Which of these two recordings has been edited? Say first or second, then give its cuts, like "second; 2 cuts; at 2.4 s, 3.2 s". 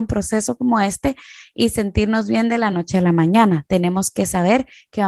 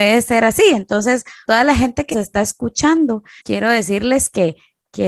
second; 3 cuts; at 1.5 s, 2.1 s, 3.4 s